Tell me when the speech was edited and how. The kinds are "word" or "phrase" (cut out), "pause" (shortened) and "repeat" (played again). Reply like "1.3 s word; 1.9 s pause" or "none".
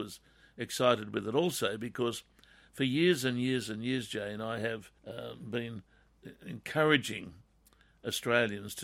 5.0 s pause